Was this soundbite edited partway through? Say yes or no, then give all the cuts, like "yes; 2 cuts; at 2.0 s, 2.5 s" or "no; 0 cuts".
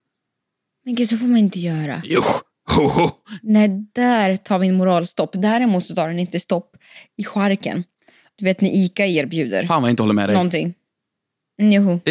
no; 0 cuts